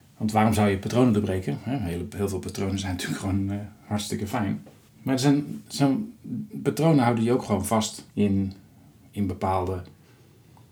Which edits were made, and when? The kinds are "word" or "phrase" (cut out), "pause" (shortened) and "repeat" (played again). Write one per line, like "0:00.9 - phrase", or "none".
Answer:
0:04.9 - pause
0:08.1 - pause